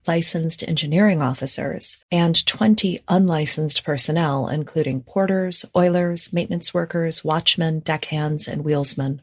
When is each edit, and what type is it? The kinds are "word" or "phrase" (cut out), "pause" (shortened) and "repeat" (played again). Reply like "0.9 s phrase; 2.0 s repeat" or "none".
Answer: 2.0 s pause